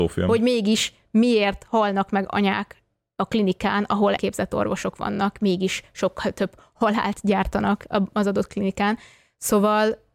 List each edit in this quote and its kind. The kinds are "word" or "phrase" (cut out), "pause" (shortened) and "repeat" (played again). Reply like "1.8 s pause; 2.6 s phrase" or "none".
4.2 s phrase